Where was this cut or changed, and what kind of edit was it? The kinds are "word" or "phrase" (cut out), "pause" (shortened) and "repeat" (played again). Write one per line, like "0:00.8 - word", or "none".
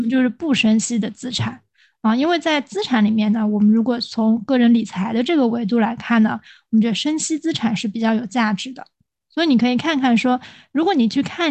none